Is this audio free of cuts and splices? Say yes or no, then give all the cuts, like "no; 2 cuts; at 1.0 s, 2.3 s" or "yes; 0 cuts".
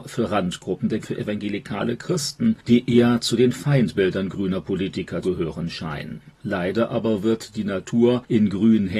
no; 3 cuts; at 1.0 s, 5.2 s, 6.3 s